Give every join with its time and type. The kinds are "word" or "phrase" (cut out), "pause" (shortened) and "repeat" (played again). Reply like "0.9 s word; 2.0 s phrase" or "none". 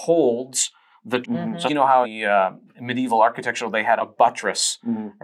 1.2 s word; 1.7 s word; 2.0 s word; 4.0 s word